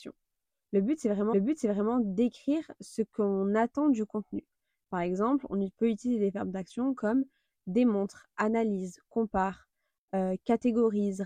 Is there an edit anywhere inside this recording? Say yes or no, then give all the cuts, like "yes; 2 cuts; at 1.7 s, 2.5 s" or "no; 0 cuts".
yes; 1 cut; at 1.3 s